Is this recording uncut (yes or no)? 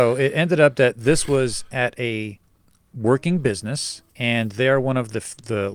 no